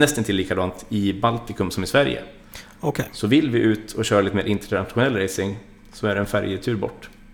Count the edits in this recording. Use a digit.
0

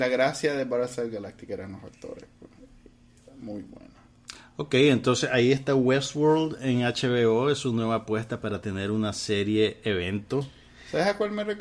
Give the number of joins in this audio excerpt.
0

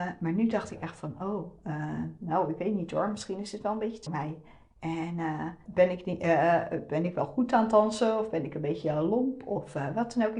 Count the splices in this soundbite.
2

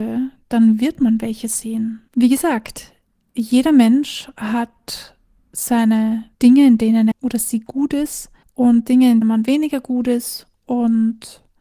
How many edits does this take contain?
4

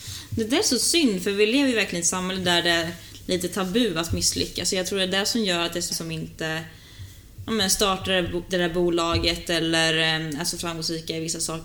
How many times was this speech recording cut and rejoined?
1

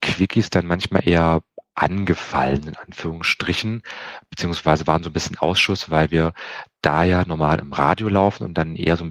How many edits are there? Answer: 0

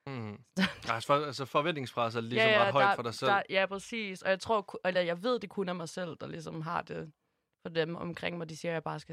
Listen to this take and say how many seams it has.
0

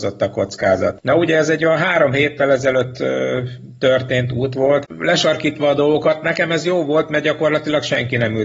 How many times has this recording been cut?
0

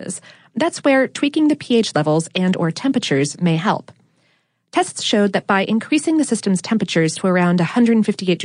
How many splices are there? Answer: 0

